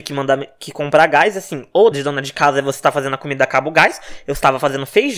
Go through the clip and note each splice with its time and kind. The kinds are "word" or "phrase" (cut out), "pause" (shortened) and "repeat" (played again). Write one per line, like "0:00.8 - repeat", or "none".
0:01.9 - word